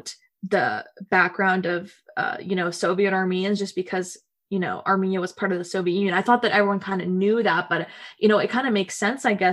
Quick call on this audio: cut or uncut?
uncut